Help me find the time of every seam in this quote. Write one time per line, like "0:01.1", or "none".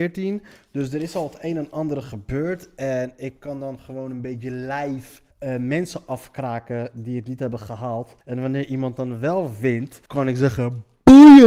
0:05.3
0:08.2
0:10.1

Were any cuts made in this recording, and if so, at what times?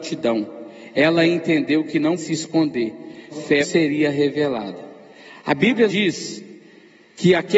0:02.2
0:03.3
0:03.6
0:05.9

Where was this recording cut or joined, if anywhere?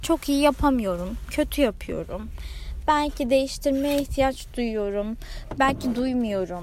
none

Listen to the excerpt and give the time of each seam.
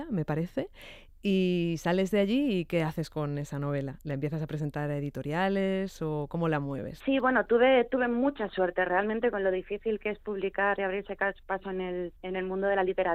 0:12.2

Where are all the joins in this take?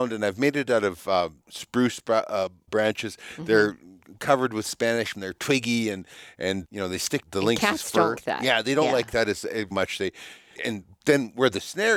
0:01.4
0:02.7
0:05.1
0:06.6
0:07.2
0:08.2
0:09.7
0:10.5

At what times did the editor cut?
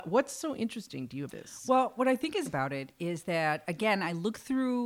0:01.3
0:02.5

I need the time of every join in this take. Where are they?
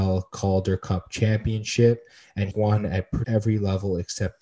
0:02.5
0:03.2

